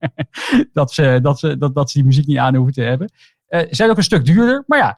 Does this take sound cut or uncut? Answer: uncut